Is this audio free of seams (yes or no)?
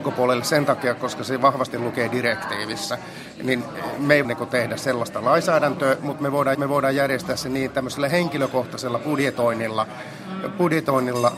no